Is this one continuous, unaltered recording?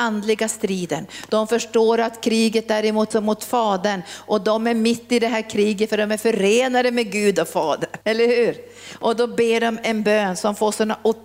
no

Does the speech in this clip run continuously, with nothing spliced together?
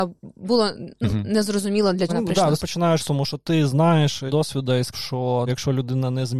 no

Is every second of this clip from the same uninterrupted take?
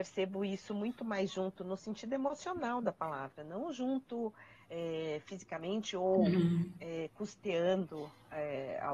yes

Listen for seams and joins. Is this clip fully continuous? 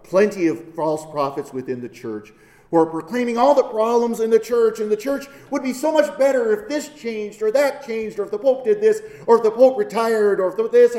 yes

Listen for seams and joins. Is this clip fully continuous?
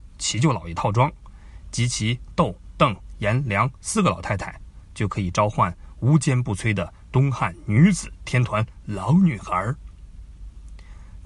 yes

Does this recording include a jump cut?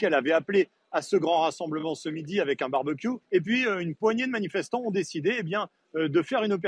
yes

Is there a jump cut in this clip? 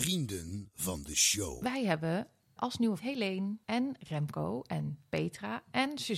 yes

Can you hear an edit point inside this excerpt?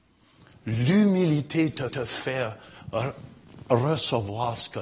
yes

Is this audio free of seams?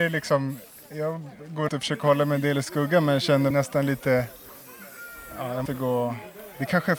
no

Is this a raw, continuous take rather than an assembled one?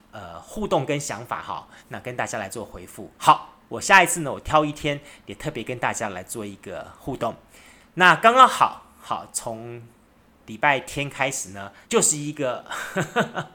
no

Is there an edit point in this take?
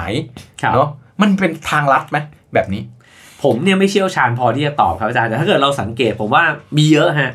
no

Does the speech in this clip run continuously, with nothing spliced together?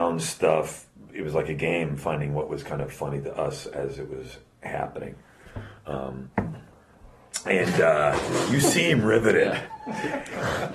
yes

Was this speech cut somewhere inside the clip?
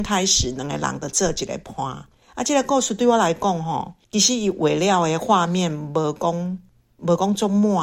yes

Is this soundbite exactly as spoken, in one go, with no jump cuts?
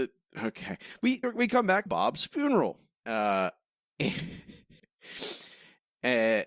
no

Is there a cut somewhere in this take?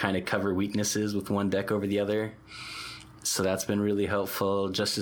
no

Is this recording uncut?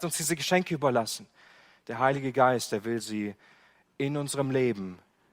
yes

